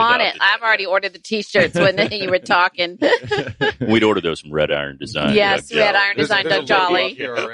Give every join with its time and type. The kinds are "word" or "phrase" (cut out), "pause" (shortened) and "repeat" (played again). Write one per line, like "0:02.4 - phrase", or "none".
none